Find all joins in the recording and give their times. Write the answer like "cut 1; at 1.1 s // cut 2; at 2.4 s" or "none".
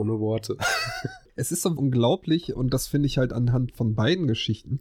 cut 1; at 1.8 s